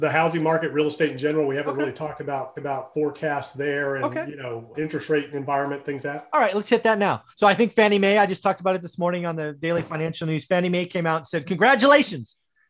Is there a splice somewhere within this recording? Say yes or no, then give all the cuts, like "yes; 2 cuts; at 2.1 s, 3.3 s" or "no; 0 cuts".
yes; 4 cuts; at 2.6 s, 4.7 s, 6.0 s, 7.3 s